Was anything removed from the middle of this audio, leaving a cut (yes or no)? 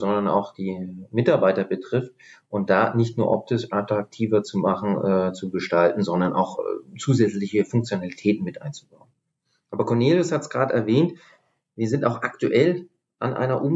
no